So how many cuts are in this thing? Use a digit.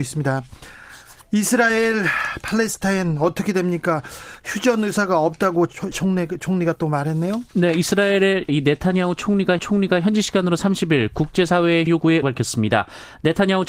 6